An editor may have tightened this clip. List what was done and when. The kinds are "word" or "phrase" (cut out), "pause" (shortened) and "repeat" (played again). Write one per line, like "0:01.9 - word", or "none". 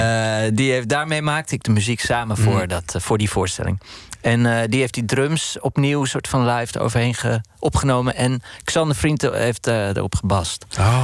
none